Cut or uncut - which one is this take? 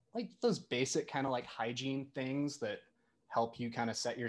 uncut